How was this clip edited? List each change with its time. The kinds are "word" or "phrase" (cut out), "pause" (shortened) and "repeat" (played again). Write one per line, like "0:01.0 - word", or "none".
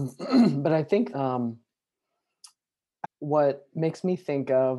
0:01.1 - word
0:03.0 - phrase